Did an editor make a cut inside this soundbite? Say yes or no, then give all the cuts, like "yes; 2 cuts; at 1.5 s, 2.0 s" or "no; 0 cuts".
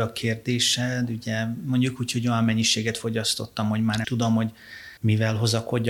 yes; 2 cuts; at 4.0 s, 5.0 s